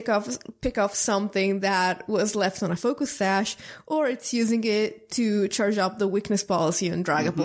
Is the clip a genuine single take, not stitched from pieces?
yes; 0 cuts

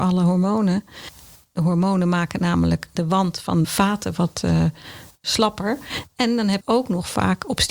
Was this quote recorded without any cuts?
no; 2 cuts; at 3.6 s, 6.6 s

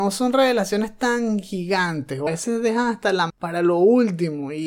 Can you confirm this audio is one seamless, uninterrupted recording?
no; 2 cuts; at 2.3 s, 3.3 s

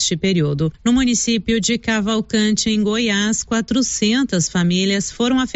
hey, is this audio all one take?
yes; 0 cuts

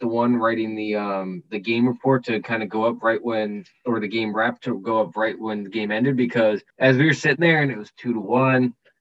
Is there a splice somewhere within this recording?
yes; 1 cut; at 6.7 s

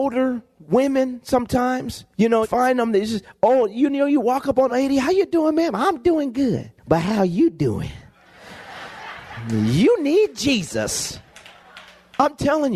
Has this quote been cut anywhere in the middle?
yes; 4 cuts; at 2.1 s, 2.4 s, 4.7 s, 6.8 s

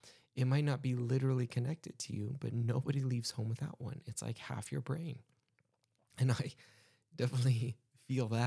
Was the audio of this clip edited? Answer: no; 0 cuts

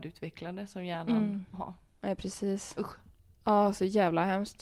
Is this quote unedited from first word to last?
no; 1 cut; at 1.5 s

